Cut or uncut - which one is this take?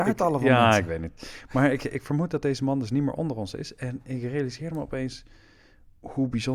uncut